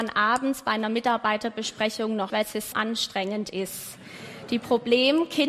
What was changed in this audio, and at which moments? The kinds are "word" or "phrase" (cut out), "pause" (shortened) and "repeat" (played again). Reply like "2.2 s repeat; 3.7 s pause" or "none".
2.3 s word; 2.7 s word